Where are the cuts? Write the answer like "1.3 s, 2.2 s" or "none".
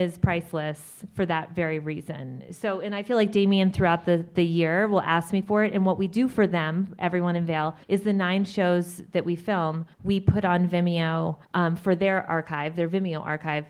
7.8 s, 9.9 s, 11.4 s